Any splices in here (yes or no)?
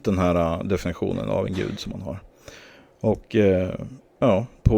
no